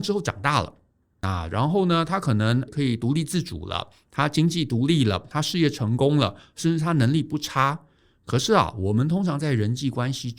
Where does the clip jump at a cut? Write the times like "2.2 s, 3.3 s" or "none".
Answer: 2.7 s